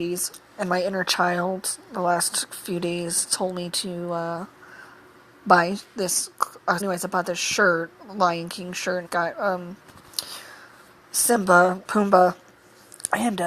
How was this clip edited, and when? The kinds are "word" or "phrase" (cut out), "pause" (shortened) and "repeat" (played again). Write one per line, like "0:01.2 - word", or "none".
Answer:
0:06.8 - word
0:09.0 - word
0:11.8 - word